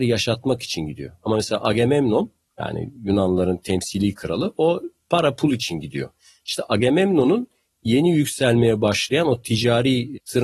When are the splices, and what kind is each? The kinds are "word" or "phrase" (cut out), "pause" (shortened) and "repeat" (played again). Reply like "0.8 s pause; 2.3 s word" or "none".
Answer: none